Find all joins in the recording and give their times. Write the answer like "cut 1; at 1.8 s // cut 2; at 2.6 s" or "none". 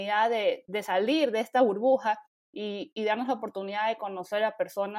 none

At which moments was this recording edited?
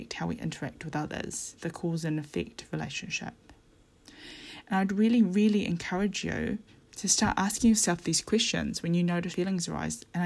cut 1; at 1.6 s // cut 2; at 6.7 s // cut 3; at 9.3 s

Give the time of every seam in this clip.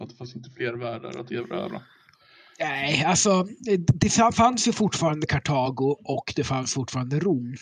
none

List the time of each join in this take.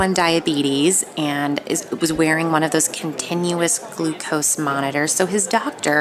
none

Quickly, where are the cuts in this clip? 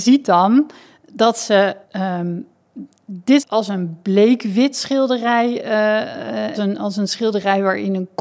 cut 1; at 1.8 s // cut 2; at 3.4 s // cut 3; at 6.5 s

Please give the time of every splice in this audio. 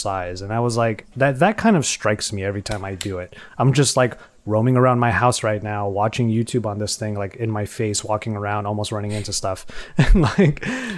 none

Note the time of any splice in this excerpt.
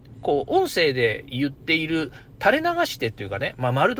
none

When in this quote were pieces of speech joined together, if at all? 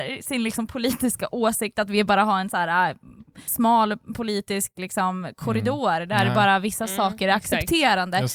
cut 1; at 3.5 s

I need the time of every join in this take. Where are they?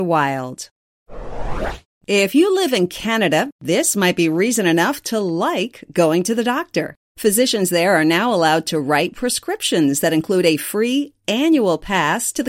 cut 1; at 1.8 s

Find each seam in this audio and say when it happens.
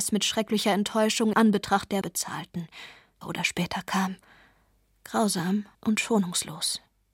cut 1; at 1.3 s // cut 2; at 2.0 s // cut 3; at 3.2 s // cut 4; at 5.7 s

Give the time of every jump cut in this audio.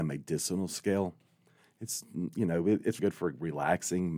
cut 1; at 3.0 s

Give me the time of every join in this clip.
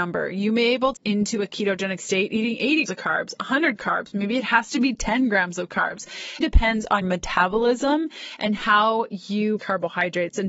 cut 1; at 1.0 s // cut 2; at 2.9 s // cut 3; at 3.8 s // cut 4; at 6.4 s // cut 5; at 7.0 s // cut 6; at 9.6 s

